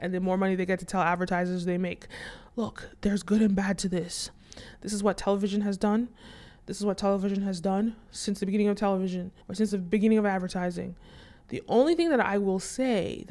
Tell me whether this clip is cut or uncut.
cut